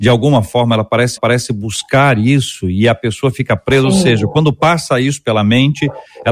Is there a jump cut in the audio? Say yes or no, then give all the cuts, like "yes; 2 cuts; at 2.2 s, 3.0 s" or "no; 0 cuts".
yes; 1 cut; at 1.2 s